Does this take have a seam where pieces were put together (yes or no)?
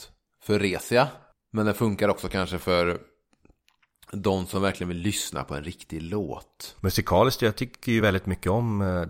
no